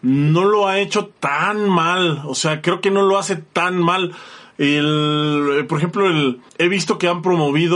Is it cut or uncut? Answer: cut